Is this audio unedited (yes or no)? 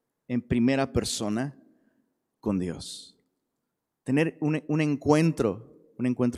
yes